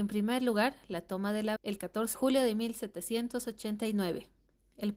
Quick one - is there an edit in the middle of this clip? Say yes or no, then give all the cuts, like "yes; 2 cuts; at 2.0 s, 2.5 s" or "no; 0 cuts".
yes; 2 cuts; at 1.6 s, 2.1 s